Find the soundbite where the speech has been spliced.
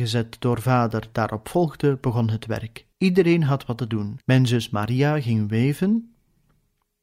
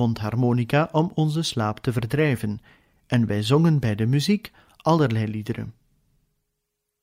first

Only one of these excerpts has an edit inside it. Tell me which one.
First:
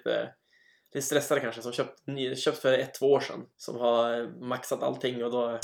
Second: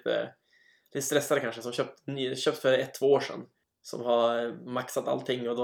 first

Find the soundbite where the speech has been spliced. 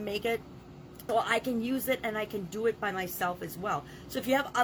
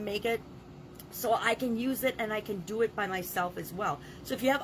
first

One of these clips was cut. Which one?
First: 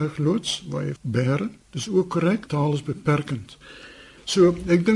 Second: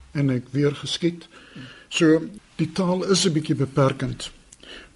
first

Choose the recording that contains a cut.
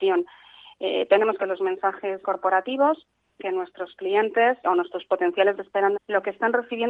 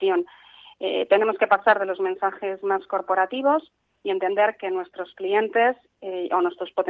first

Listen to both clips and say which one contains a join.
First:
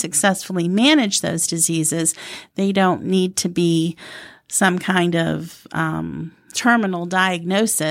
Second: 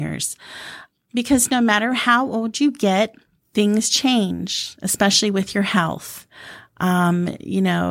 second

